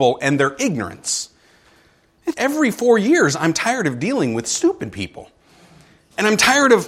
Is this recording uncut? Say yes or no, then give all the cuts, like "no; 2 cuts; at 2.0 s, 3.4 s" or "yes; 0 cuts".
no; 1 cut; at 2.3 s